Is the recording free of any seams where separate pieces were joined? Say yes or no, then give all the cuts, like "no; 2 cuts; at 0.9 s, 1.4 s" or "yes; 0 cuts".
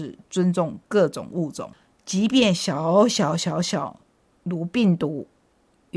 yes; 0 cuts